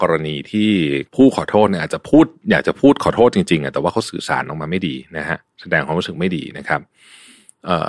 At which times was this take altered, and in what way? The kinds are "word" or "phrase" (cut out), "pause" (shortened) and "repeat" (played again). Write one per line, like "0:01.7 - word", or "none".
0:01.1 - pause